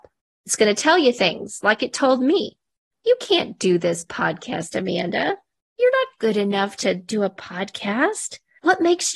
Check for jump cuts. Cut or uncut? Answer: uncut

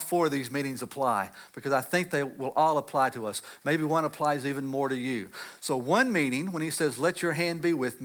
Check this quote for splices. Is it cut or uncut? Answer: uncut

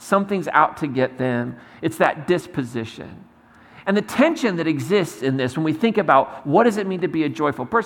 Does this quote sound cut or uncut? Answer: uncut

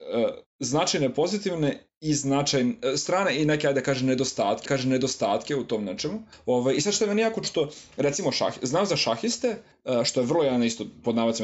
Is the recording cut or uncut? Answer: cut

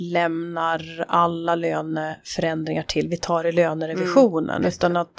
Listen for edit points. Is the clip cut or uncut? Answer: uncut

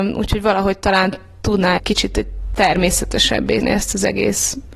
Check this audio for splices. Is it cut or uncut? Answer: cut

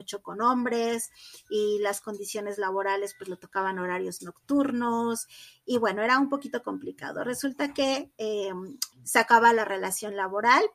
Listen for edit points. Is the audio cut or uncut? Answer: cut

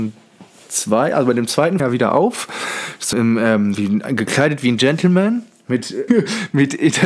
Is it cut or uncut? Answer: cut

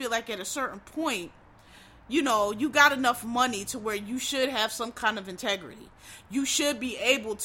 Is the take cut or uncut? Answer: uncut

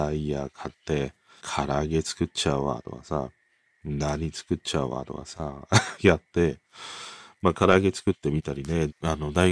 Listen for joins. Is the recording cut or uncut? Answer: cut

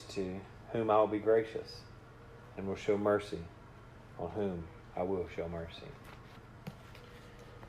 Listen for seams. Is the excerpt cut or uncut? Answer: uncut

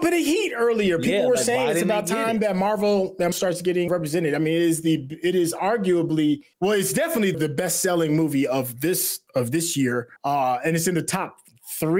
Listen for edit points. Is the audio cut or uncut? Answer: cut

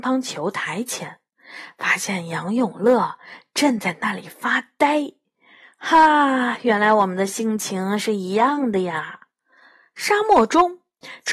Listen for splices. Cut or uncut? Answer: uncut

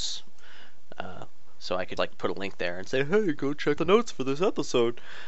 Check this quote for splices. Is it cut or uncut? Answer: cut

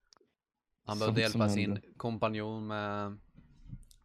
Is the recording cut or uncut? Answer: uncut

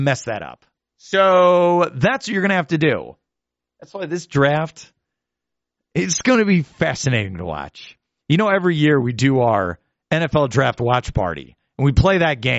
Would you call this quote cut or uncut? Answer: uncut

